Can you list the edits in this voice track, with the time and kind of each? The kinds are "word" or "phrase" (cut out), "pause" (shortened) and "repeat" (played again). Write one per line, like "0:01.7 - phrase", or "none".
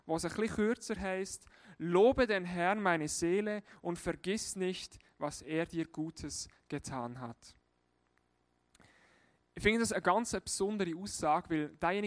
none